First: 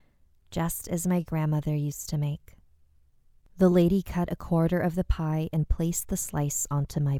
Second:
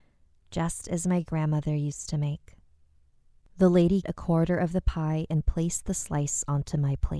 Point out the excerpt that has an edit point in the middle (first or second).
second